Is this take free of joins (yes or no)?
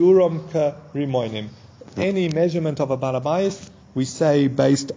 yes